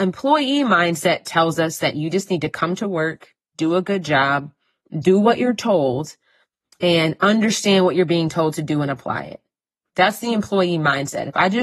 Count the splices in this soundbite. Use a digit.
0